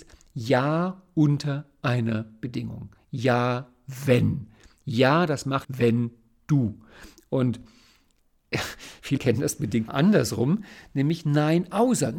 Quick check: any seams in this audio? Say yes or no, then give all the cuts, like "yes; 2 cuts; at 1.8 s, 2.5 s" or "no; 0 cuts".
yes; 3 cuts; at 5.6 s, 9.2 s, 9.9 s